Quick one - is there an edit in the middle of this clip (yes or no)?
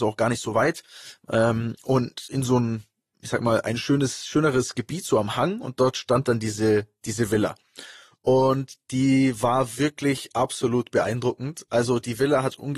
no